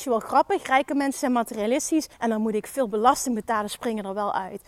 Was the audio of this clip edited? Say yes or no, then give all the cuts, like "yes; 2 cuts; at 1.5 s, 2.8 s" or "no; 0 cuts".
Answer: yes; 1 cut; at 2.1 s